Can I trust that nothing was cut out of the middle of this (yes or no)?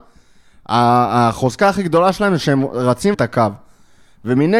no